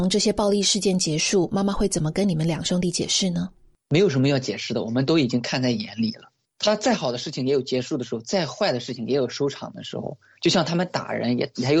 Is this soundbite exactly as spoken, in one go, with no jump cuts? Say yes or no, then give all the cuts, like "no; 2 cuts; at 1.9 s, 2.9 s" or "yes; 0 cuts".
yes; 0 cuts